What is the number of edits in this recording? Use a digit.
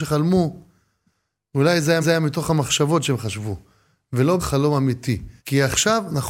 3